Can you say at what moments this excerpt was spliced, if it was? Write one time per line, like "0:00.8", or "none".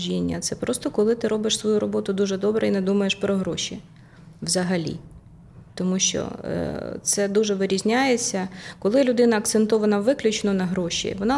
0:05.7